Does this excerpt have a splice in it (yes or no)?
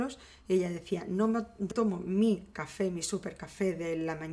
yes